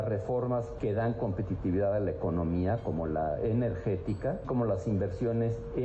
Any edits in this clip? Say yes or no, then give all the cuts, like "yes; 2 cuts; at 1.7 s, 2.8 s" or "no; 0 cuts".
yes; 1 cut; at 4.4 s